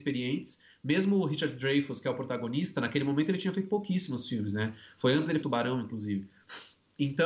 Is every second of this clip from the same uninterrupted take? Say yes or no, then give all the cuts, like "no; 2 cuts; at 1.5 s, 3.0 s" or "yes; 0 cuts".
no; 1 cut; at 5.4 s